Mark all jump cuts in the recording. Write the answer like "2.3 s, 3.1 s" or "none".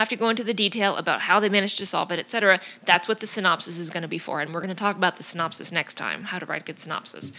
none